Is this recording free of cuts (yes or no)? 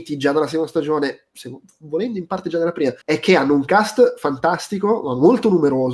no